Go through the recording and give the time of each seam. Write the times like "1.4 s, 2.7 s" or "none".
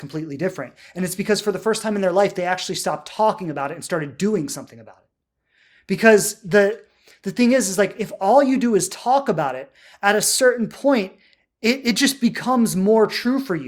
none